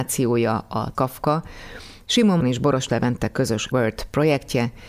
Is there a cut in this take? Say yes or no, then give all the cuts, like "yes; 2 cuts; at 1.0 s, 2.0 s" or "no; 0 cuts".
yes; 3 cuts; at 0.9 s, 2.4 s, 3.7 s